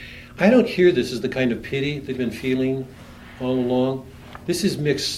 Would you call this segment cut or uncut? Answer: cut